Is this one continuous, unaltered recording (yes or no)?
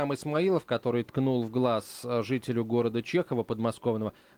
yes